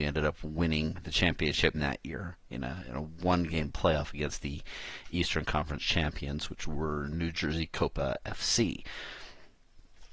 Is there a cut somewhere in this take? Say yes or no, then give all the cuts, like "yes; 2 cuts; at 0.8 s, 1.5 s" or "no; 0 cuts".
yes; 1 cut; at 1.7 s